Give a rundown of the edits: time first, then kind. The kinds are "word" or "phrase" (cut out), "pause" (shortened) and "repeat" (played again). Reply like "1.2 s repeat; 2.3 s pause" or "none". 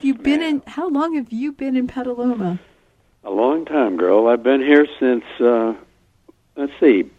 none